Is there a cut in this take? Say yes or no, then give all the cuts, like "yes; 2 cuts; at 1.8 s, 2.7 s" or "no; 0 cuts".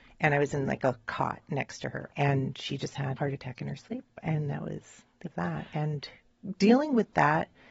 yes; 3 cuts; at 2.1 s, 3.2 s, 5.3 s